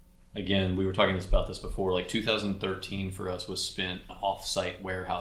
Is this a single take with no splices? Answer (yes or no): no